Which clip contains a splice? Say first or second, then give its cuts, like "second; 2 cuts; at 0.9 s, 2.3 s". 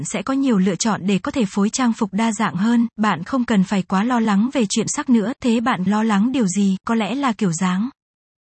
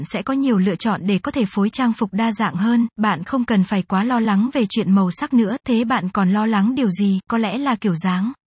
first; 2 cuts; at 4.9 s, 5.9 s